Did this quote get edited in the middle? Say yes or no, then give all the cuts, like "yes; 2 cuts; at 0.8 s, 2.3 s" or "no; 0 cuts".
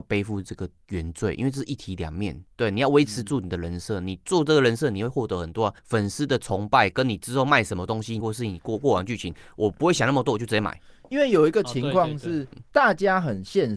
yes; 3 cuts; at 5.8 s, 8.2 s, 12.5 s